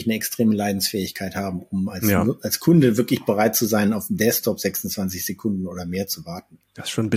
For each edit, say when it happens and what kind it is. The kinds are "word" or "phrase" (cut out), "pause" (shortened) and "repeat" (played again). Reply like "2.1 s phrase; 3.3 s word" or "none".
none